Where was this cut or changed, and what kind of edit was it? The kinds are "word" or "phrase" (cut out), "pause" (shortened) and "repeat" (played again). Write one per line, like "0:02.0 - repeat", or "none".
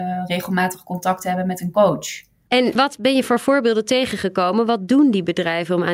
0:02.8 - word